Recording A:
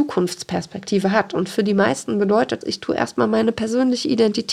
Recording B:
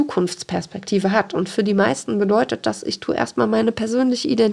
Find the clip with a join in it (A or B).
A